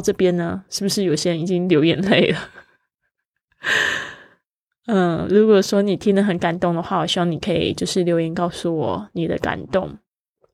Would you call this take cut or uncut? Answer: uncut